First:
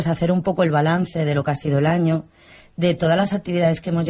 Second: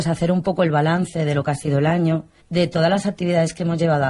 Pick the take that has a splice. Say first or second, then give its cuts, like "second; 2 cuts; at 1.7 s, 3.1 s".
second; 1 cut; at 2.4 s